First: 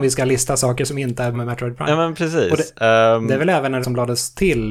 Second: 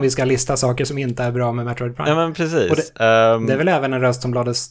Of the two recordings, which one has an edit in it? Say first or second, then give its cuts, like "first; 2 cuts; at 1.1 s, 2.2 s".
first; 2 cuts; at 1.3 s, 3.8 s